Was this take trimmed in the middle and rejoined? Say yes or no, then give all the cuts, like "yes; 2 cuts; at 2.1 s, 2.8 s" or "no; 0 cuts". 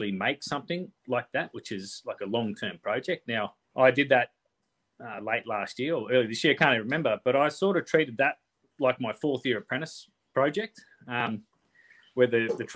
yes; 1 cut; at 3.6 s